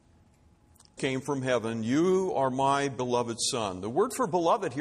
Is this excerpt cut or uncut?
cut